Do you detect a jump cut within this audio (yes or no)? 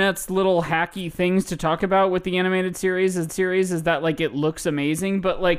yes